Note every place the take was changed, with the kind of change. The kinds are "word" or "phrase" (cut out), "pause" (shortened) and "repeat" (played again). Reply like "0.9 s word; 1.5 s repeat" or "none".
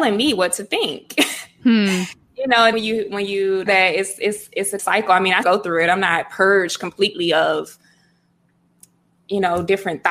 2.7 s word; 3.7 s word; 4.8 s word; 5.4 s word